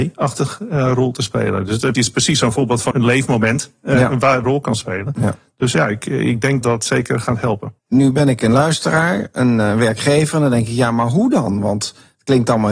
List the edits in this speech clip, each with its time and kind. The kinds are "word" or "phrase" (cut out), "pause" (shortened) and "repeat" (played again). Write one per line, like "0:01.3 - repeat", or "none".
0:01.9 - word
0:02.9 - word
0:04.4 - phrase
0:06.6 - word
0:07.8 - pause